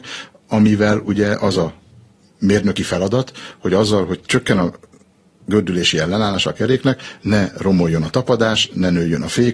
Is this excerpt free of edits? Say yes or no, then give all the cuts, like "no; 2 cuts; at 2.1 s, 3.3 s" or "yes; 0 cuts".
yes; 0 cuts